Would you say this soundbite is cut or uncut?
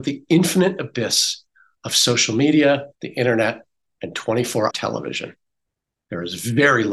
cut